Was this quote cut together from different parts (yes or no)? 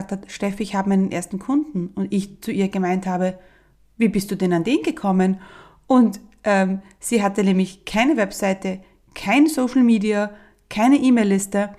no